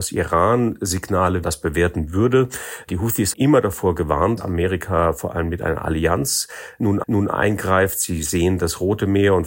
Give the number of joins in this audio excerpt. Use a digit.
4